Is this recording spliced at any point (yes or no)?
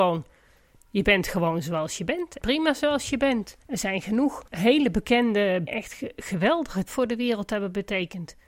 yes